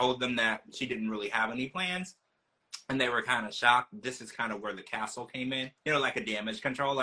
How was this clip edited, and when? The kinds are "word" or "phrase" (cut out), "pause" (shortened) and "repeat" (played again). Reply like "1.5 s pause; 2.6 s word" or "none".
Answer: 5.8 s pause

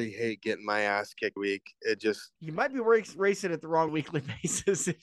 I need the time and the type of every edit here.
1.4 s word; 2.4 s pause; 3.9 s phrase

